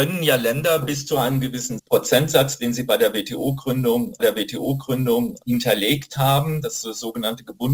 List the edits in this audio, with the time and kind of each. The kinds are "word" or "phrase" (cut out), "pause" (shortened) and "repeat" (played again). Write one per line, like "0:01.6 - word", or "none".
0:04.2 - repeat